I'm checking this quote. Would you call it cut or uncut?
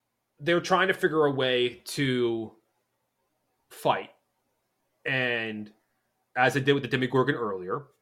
uncut